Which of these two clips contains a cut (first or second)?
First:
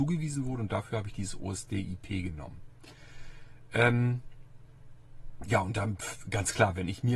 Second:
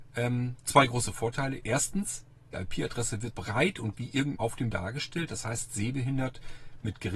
second